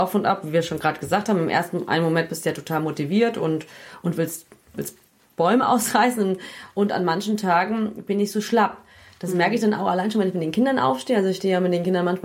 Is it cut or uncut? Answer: uncut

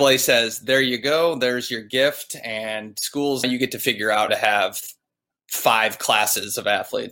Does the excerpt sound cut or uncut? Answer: cut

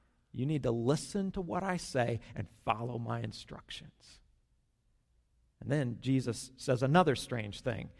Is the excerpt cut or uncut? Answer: uncut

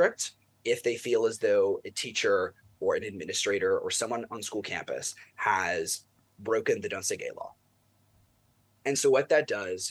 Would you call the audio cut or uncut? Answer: uncut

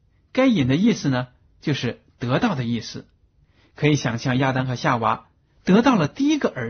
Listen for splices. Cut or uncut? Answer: uncut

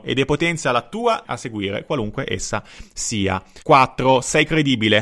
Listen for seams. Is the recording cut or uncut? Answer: cut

